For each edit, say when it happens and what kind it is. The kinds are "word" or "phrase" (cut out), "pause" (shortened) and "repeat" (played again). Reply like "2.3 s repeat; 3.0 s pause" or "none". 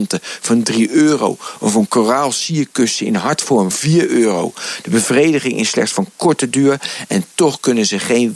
3.7 s word